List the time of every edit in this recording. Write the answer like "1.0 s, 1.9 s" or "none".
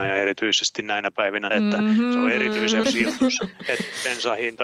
1.5 s, 2.8 s